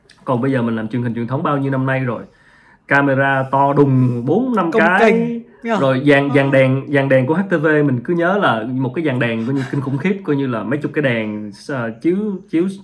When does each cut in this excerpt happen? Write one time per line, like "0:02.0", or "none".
none

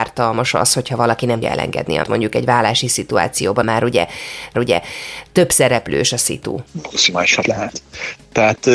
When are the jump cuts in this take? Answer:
0:01.4
0:02.0
0:03.6
0:04.5
0:07.4

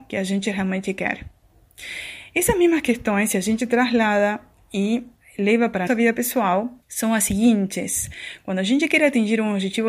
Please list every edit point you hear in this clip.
0:05.9
0:06.8

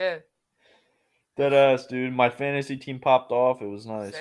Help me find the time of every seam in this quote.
none

